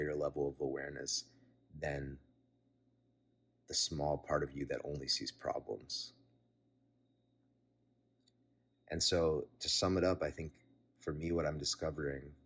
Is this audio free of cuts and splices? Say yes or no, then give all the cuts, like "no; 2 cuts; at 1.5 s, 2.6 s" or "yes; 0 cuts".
yes; 0 cuts